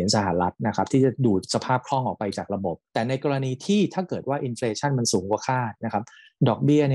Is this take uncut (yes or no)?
no